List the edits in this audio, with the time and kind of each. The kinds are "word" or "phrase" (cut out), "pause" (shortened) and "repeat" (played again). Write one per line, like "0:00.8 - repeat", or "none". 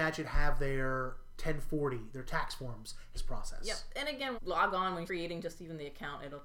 0:03.1 - phrase
0:04.3 - phrase
0:05.1 - word